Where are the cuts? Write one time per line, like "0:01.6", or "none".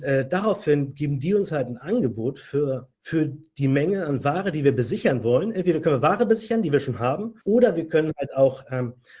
0:02.9
0:07.4

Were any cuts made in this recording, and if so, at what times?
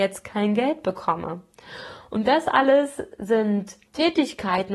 0:03.9

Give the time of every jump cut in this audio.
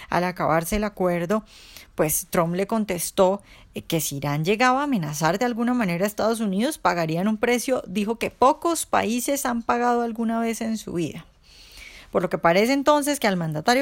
none

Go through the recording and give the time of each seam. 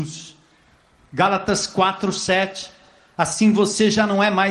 none

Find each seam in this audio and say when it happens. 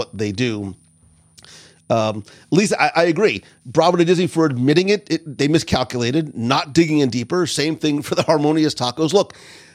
none

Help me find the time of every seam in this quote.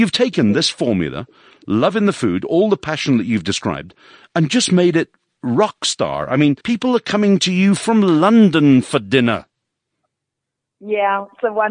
0:06.6

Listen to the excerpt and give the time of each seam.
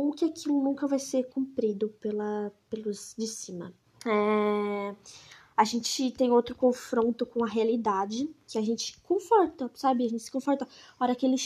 0:03.9

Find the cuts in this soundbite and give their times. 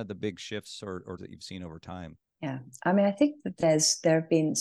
0:01.2

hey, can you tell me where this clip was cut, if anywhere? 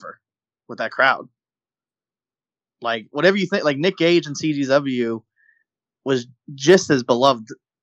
none

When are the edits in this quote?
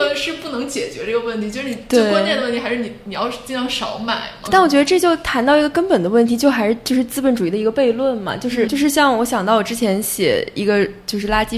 0:04.5
0:08.7

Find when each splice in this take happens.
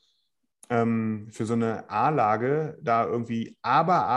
none

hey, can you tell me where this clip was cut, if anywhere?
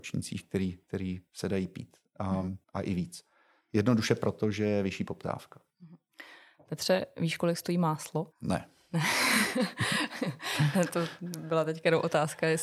0:02.6
0:08.3

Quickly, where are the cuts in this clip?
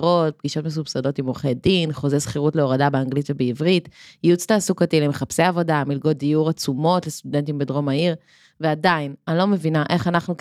none

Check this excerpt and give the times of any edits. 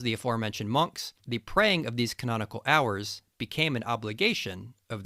0:01.2

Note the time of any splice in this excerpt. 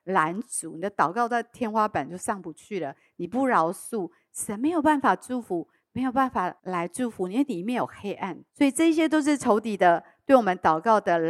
0:06.6
0:08.5

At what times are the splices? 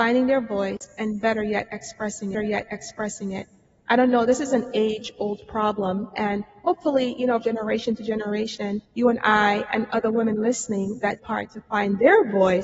0:02.3
0:07.4
0:08.9
0:11.2

